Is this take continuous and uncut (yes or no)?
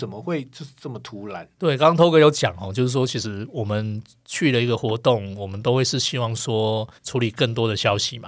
no